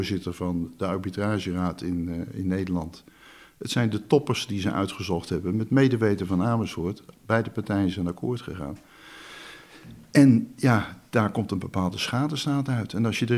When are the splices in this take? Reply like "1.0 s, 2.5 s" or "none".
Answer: none